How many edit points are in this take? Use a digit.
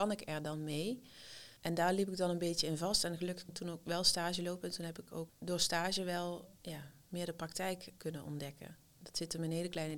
2